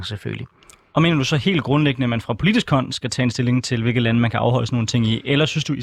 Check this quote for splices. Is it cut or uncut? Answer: uncut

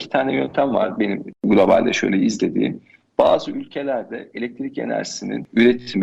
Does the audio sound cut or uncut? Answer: uncut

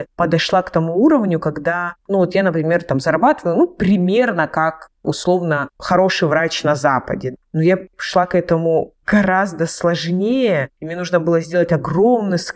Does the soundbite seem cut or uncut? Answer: uncut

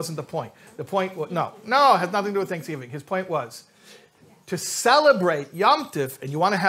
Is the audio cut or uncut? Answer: uncut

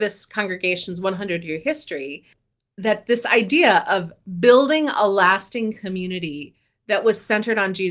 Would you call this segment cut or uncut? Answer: uncut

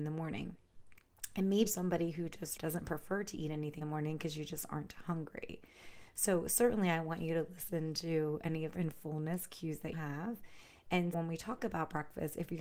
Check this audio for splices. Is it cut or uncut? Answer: cut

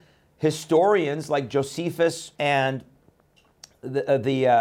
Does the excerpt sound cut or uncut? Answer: cut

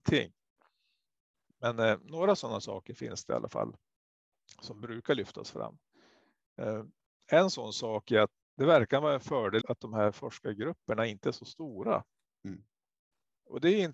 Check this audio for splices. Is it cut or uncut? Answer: cut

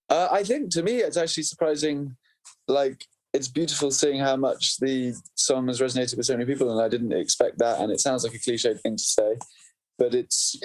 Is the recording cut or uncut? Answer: uncut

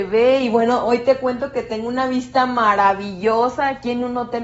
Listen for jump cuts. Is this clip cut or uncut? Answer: uncut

